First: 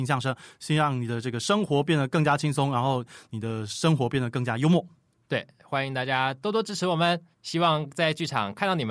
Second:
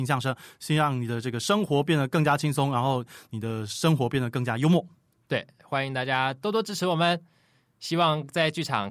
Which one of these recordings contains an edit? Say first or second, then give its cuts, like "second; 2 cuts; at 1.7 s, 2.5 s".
first; 1 cut; at 7.3 s